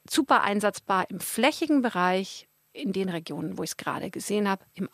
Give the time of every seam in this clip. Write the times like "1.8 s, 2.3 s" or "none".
none